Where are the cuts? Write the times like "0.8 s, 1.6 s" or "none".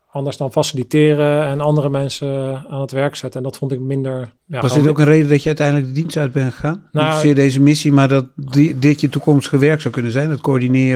4.4 s